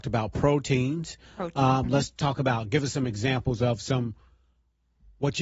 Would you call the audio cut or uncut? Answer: uncut